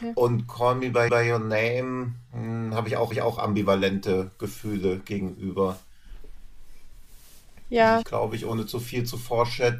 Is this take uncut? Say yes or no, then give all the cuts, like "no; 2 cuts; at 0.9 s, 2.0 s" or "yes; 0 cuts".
no; 3 cuts; at 1.1 s, 3.1 s, 8.0 s